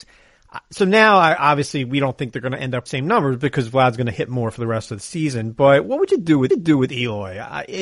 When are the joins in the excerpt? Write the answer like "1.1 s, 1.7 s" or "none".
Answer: 2.9 s, 6.5 s